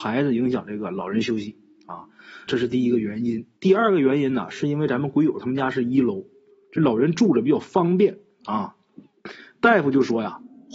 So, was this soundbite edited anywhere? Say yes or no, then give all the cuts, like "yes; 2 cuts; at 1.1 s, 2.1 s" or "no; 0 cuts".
yes; 2 cuts; at 2.5 s, 3.6 s